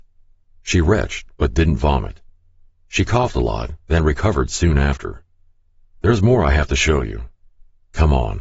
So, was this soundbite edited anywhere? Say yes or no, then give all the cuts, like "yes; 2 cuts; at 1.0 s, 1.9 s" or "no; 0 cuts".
no; 0 cuts